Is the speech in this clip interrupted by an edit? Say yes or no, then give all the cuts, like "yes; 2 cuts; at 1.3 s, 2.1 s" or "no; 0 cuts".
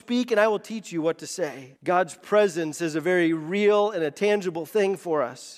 yes; 1 cut; at 1.8 s